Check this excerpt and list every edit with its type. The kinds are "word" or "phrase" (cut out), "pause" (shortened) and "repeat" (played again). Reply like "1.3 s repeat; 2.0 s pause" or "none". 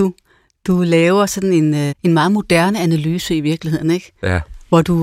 1.9 s word